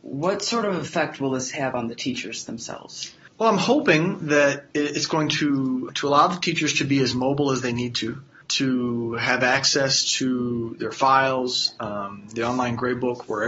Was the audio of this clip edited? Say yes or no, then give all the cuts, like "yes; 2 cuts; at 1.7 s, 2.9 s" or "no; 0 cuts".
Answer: no; 0 cuts